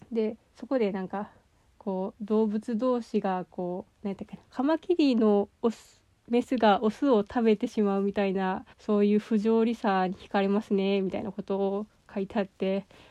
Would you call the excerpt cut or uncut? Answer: cut